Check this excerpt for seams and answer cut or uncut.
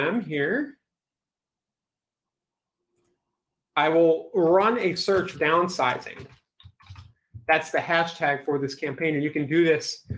cut